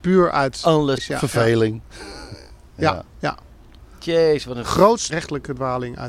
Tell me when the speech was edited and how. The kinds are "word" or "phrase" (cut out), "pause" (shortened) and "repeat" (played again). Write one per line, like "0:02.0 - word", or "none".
0:01.0 - phrase
0:02.7 - word
0:03.9 - pause
0:05.1 - word